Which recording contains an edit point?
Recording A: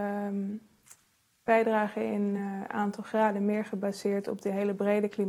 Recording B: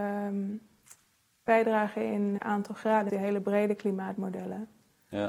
B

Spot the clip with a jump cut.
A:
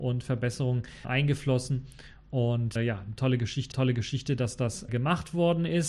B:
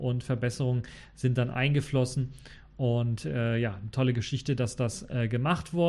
A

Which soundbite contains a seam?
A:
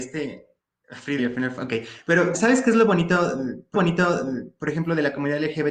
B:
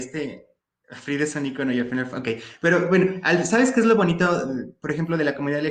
A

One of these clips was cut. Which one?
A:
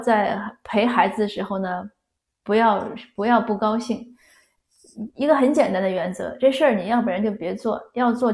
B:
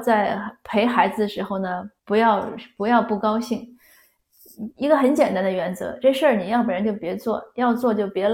B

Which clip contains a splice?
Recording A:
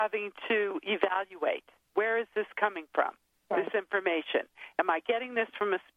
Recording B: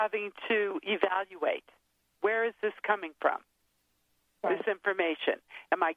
A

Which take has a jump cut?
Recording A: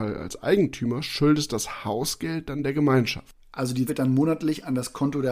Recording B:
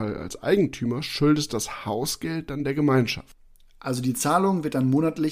A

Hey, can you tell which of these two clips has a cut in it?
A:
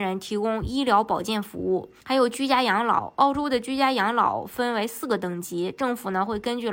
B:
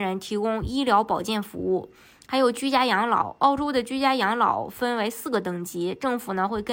A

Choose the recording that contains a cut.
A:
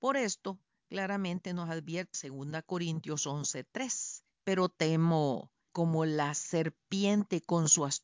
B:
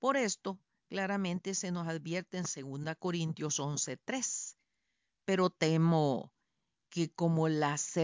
A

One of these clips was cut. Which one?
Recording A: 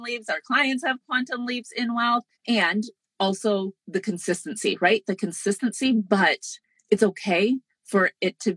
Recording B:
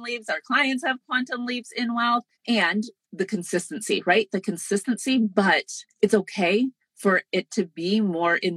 B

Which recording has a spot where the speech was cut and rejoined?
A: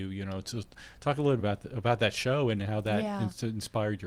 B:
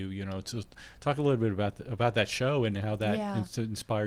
A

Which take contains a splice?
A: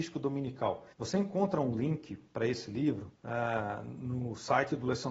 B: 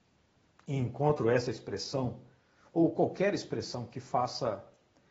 A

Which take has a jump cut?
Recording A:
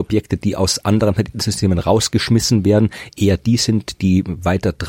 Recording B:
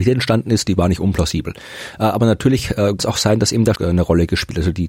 B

